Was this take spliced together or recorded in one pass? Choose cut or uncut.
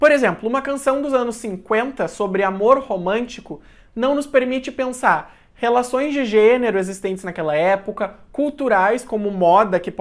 uncut